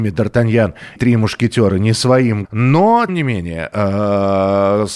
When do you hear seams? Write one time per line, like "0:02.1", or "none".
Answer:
0:01.0
0:02.4
0:03.1

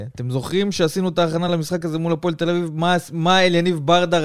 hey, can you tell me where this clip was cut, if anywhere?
none

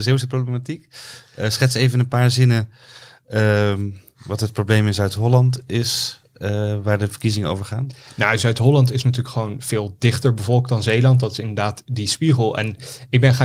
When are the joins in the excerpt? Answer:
none

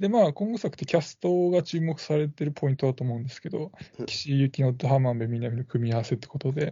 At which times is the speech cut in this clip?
0:03.9

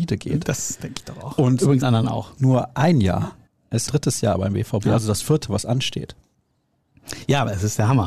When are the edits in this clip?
0:01.8
0:03.5
0:03.9

